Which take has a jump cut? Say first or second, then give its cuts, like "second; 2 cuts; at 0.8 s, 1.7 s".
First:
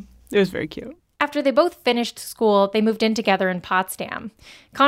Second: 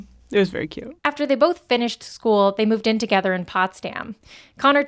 second; 1 cut; at 1.0 s